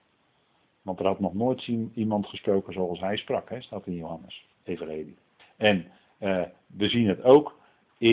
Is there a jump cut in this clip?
yes; 2 cuts; at 4.5 s, 5.4 s

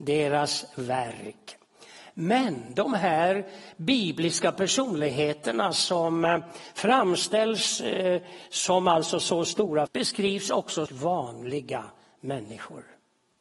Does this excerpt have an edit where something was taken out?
yes; 2 cuts; at 9.9 s, 10.9 s

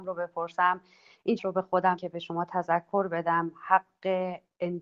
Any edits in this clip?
yes; 2 cuts; at 1.4 s, 2.0 s

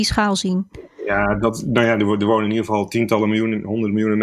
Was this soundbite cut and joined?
no; 0 cuts

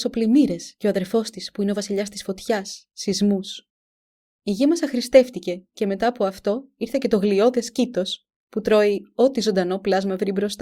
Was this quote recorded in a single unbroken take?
yes; 0 cuts

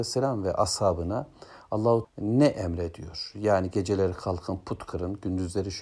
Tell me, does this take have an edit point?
yes; 1 cut; at 2.0 s

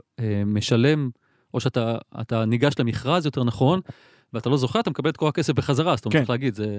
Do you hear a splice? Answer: no; 0 cuts

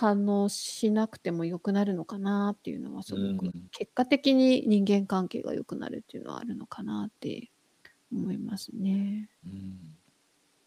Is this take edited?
yes; 3 cuts; at 3.7 s, 7.8 s, 9.4 s

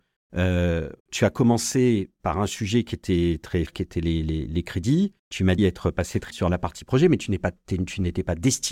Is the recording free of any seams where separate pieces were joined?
no; 6 cuts; at 1.0 s, 3.7 s, 4.2 s, 5.2 s, 5.6 s, 6.3 s

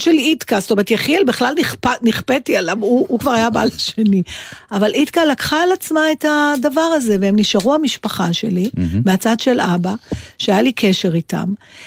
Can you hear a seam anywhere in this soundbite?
no; 0 cuts

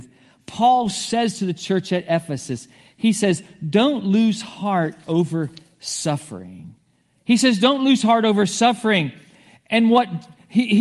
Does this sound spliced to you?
no; 0 cuts

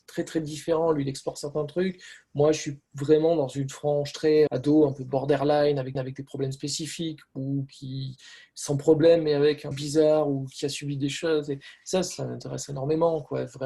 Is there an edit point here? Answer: yes; 4 cuts; at 2.9 s, 4.5 s, 5.9 s, 9.7 s

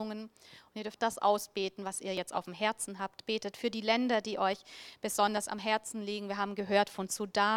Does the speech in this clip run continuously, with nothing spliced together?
no; 1 cut; at 1.0 s

